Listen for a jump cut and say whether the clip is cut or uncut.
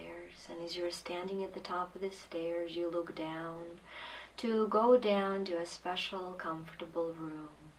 uncut